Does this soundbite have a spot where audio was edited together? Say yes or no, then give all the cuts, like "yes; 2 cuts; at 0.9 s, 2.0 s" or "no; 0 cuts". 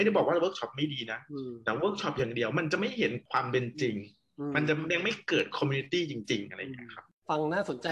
no; 0 cuts